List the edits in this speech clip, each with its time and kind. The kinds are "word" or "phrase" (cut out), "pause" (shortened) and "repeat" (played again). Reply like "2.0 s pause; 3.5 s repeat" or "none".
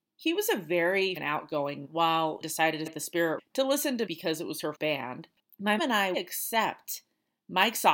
1.2 s word; 1.8 s word; 2.4 s word; 2.9 s word; 3.4 s word; 4.1 s word; 4.7 s word; 5.8 s word; 6.1 s word